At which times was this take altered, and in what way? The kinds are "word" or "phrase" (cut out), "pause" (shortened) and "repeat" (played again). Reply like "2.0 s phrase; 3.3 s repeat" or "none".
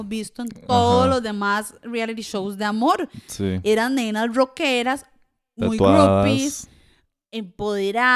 none